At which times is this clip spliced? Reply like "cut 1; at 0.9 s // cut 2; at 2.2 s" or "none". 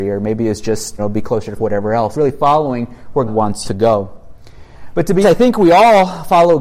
cut 1; at 1.0 s // cut 2; at 1.6 s // cut 3; at 2.1 s // cut 4; at 3.3 s // cut 5; at 3.6 s // cut 6; at 5.2 s